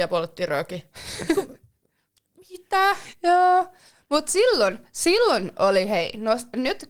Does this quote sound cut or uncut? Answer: uncut